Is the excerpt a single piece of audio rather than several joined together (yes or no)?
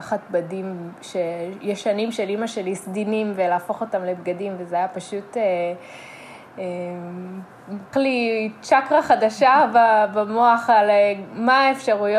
no